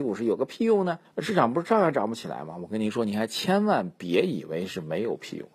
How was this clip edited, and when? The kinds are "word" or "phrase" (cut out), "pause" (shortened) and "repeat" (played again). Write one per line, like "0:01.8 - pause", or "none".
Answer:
0:01.0 - pause